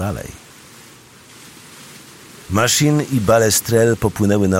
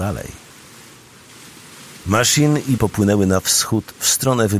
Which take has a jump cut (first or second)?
second